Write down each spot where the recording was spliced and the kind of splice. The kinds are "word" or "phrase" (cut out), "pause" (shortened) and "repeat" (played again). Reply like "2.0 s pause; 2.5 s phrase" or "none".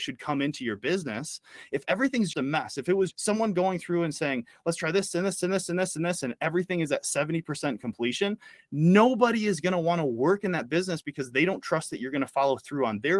2.3 s word; 3.1 s word